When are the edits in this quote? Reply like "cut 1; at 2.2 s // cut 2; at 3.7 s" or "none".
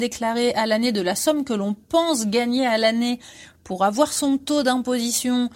none